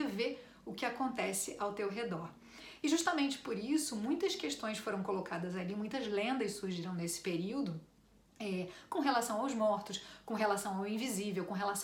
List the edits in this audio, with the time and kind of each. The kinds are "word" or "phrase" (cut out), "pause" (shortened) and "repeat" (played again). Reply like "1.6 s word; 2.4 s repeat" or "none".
none